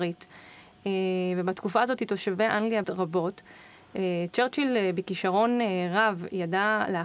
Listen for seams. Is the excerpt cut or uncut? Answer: cut